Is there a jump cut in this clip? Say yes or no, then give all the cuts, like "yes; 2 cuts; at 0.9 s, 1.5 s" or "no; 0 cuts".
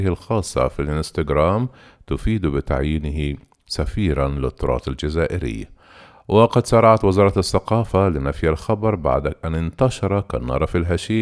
no; 0 cuts